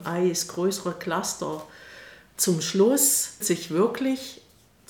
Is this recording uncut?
no; 1 cut; at 3.4 s

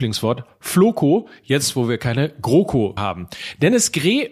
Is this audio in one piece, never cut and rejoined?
no; 1 cut; at 3.0 s

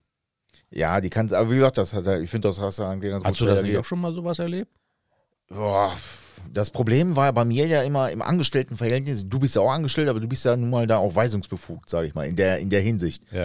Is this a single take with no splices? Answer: yes; 0 cuts

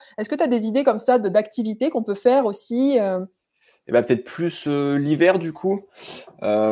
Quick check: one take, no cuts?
yes; 0 cuts

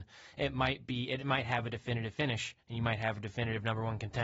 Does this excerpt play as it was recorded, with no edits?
yes; 0 cuts

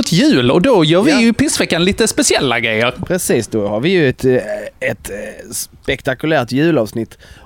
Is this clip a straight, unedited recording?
yes; 0 cuts

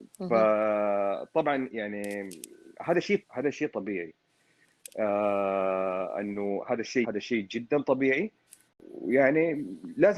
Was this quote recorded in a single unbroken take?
no; 2 cuts; at 3.2 s, 7.0 s

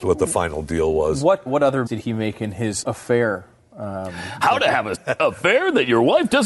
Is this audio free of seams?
no; 4 cuts; at 1.5 s, 1.9 s, 2.8 s, 4.9 s

